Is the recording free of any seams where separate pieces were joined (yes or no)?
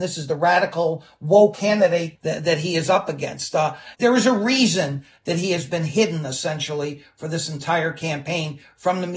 no